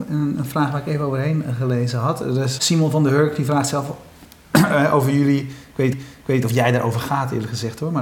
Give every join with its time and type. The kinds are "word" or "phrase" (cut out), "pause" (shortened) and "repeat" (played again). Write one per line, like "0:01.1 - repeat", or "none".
0:02.6 - word
0:05.9 - repeat

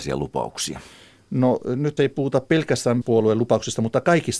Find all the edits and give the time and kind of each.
0:02.0 - word
0:03.0 - word

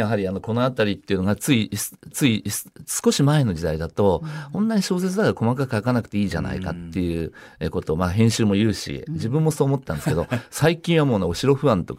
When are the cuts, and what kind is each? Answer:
0:02.1 - repeat

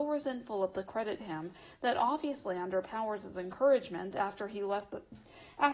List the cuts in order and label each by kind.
0:01.2 - word

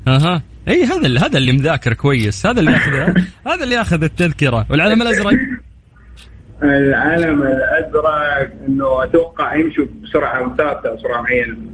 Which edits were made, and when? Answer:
none

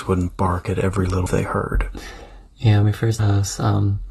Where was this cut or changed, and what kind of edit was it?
0:01.3 - word
0:02.8 - word
0:03.2 - phrase

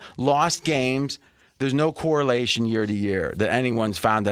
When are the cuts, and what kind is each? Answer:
none

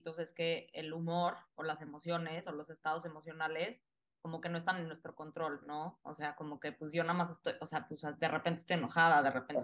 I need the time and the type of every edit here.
none

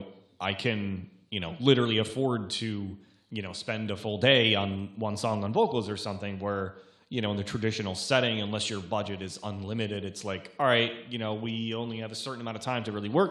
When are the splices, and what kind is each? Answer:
none

